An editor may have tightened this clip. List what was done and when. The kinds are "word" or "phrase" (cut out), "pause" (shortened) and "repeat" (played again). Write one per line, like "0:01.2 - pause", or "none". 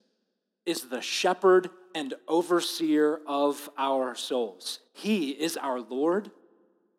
0:04.9 - pause